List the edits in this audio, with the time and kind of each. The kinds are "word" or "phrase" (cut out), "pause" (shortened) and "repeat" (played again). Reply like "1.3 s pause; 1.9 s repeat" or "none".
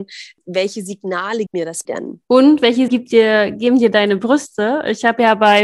1.5 s word; 1.8 s word; 2.2 s pause; 2.9 s word